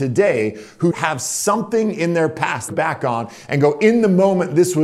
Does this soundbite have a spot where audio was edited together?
yes; 2 cuts; at 0.9 s, 2.7 s

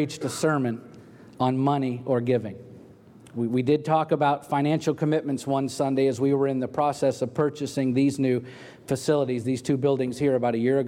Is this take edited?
no; 0 cuts

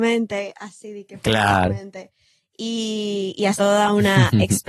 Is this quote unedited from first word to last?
no; 1 cut; at 3.6 s

